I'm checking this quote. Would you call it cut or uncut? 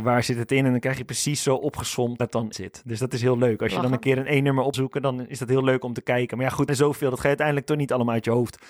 cut